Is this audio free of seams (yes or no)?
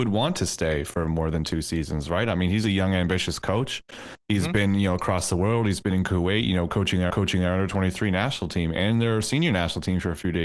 no